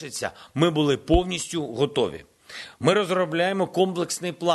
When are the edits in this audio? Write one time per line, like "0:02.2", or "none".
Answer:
none

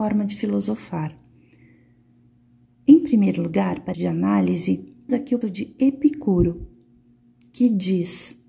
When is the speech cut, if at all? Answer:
0:03.9
0:05.1
0:05.4

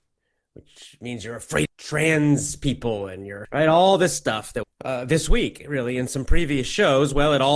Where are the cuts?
0:01.6
0:03.4
0:04.6

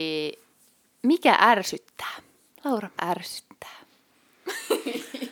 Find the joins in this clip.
0:03.0

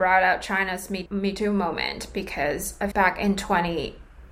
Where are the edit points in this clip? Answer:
0:01.1
0:02.9

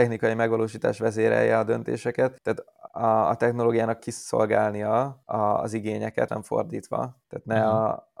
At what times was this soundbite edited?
0:04.0
0:06.3

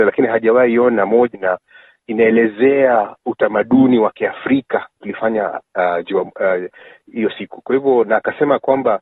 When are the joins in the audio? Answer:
0:01.3
0:05.0

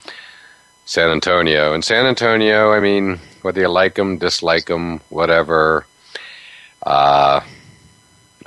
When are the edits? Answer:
none

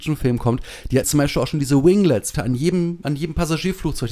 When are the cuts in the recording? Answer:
0:01.0
0:02.3

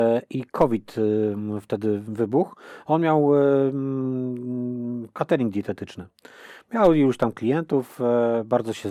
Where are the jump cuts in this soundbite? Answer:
none

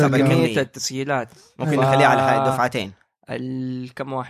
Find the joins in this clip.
none

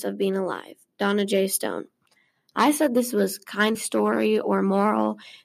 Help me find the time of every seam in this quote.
0:03.7

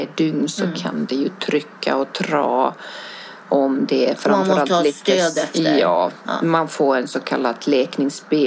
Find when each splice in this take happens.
none

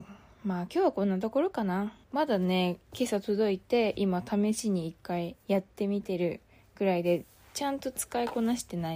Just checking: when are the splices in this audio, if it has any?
0:02.0
0:05.4

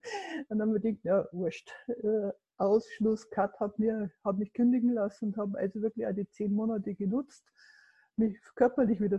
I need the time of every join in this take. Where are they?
none

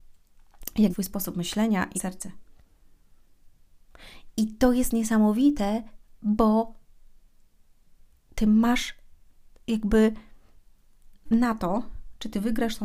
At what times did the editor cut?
0:00.9
0:02.0
0:11.3

